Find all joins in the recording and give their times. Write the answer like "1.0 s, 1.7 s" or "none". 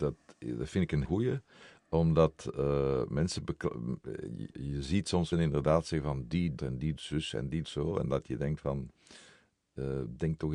1.0 s, 4.5 s, 5.3 s, 6.6 s, 7.0 s, 7.6 s